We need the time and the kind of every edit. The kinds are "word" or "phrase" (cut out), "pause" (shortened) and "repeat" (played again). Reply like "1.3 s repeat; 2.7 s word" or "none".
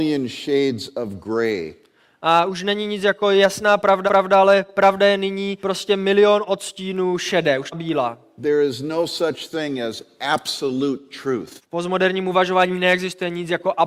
4.1 s repeat; 5.6 s pause; 7.7 s phrase; 11.6 s pause

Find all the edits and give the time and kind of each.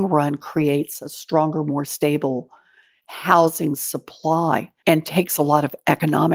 4.8 s pause

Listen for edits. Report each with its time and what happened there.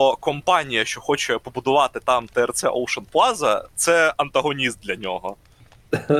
none

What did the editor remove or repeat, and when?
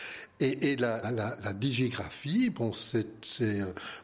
1.0 s word

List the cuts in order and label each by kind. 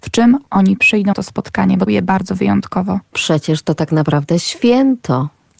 1.1 s word; 1.9 s word

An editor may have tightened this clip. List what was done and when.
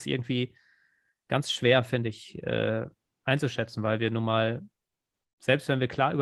none

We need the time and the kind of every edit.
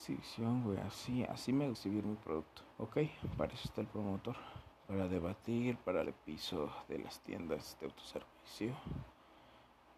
1.7 s word; 2.7 s pause; 4.8 s pause; 6.0 s phrase

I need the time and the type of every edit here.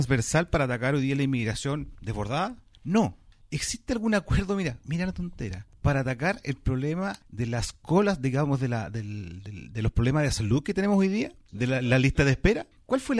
none

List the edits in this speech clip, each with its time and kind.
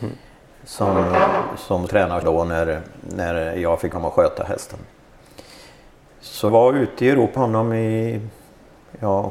1.9 s word; 2.2 s word; 3.9 s word; 6.5 s word; 7.4 s word

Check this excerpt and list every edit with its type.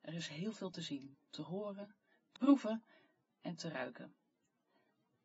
2.4 s phrase

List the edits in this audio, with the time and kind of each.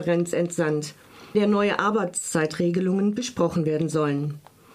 1.3 s word

